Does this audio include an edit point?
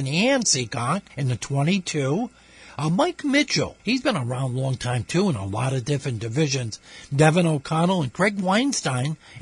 yes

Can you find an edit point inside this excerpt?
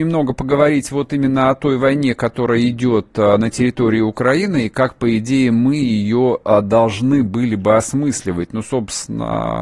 no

